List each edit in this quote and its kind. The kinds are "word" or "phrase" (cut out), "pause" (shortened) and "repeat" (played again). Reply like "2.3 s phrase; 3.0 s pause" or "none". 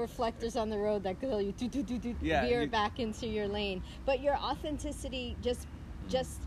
2.1 s word

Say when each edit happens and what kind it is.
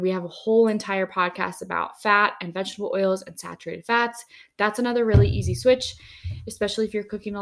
none

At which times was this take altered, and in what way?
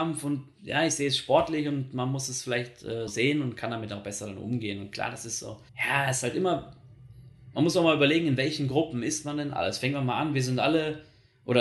3.1 s word; 5.7 s pause

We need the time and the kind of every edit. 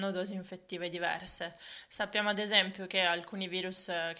none

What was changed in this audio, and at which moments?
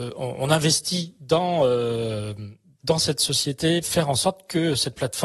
2.8 s word; 3.8 s word

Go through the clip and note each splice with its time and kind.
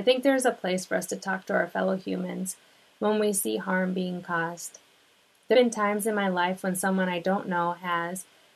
5.5 s word

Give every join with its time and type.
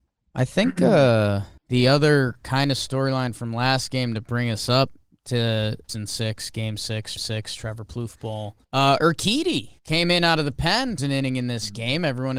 1.6 s pause; 5.9 s word; 7.2 s repeat; 8.6 s pause; 9.8 s pause; 11.0 s word

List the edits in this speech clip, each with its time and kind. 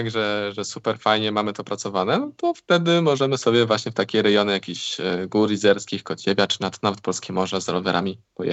none

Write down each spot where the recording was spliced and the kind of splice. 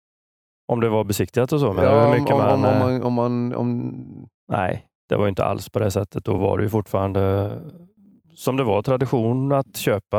none

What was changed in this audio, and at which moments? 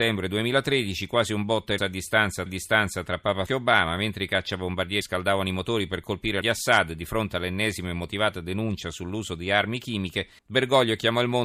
1.8 s word; 2.5 s repeat; 3.5 s word; 5.0 s word; 6.4 s phrase; 10.4 s pause

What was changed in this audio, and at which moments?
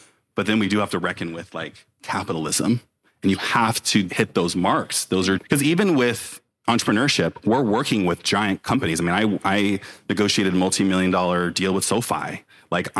5.4 s word

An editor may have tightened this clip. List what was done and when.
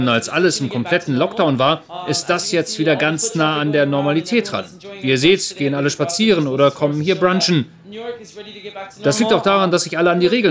none

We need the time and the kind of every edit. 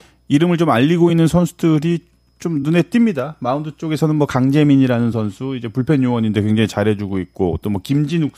none

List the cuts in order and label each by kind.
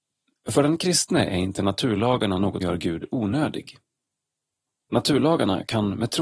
2.6 s word

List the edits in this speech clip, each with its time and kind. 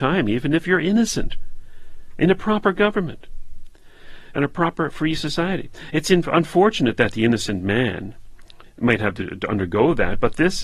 none

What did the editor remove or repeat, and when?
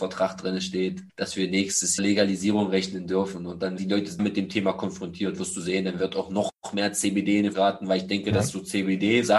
1.1 s pause; 2.0 s phrase; 3.8 s word; 4.2 s phrase; 7.5 s word

